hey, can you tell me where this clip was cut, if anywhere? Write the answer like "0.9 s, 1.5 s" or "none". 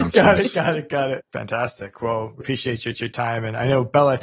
2.4 s, 2.9 s